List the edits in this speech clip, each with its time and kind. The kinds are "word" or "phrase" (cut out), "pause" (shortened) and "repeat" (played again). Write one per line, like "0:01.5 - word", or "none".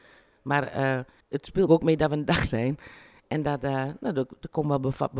0:01.2 - word
0:01.7 - word
0:02.5 - word